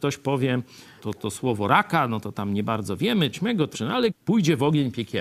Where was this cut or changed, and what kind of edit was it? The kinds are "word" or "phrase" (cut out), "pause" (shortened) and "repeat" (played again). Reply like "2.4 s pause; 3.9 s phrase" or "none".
1.0 s word; 3.3 s word; 3.7 s word; 4.1 s word